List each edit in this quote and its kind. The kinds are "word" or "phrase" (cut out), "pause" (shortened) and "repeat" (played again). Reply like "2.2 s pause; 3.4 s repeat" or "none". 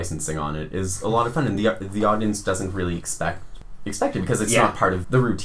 none